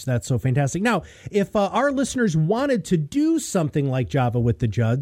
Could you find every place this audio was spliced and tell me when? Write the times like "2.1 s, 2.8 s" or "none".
none